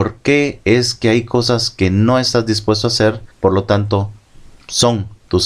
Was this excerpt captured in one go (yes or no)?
no